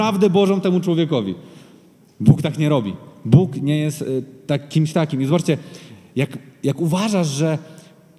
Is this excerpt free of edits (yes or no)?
yes